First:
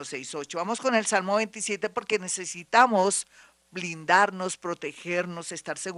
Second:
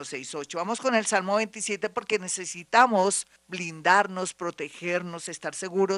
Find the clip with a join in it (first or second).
second